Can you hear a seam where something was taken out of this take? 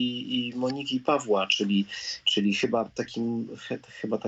no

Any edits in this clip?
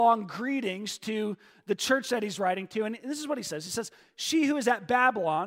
no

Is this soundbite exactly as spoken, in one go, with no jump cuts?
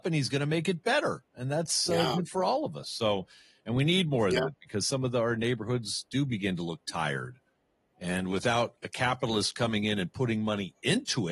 yes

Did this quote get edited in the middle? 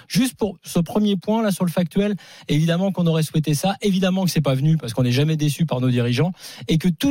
no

